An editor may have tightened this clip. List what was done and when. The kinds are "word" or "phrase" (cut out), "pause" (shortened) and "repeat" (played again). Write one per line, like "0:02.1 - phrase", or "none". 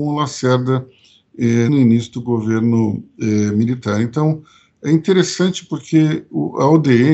0:01.7 - word